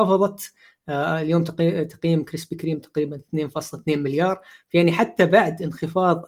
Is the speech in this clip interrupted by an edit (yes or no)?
no